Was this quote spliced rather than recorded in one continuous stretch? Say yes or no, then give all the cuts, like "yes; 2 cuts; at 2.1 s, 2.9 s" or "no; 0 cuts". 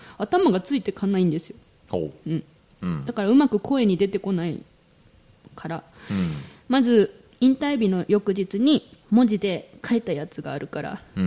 yes; 1 cut; at 9.0 s